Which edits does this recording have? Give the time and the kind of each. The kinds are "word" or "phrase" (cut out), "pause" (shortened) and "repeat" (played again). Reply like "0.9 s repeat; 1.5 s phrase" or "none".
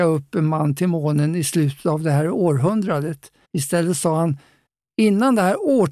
3.4 s pause; 4.7 s pause